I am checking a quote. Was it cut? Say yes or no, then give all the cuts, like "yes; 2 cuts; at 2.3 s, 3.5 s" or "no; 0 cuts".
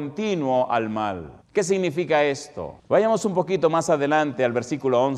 yes; 2 cuts; at 1.4 s, 2.8 s